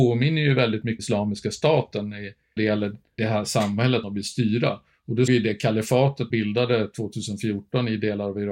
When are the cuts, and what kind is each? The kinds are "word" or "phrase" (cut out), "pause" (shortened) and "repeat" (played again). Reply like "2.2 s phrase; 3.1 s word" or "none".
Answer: 1.0 s word; 2.6 s word; 3.2 s word; 4.0 s word; 5.3 s word; 6.3 s word